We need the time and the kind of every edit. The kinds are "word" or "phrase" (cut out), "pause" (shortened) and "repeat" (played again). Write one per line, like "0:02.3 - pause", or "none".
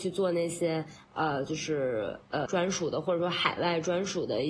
0:02.5 - word